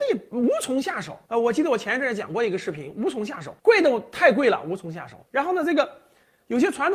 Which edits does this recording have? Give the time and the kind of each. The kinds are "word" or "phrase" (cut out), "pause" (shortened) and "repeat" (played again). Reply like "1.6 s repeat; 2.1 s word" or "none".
1.2 s pause; 3.6 s pause; 5.3 s pause